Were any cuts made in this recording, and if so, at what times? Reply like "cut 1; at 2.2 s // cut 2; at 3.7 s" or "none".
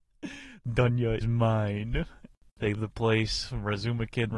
cut 1; at 1.2 s // cut 2; at 2.7 s